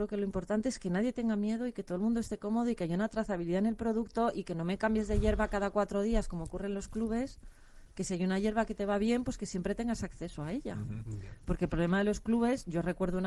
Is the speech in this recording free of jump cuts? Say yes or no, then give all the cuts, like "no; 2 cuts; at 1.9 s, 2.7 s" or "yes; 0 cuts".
yes; 0 cuts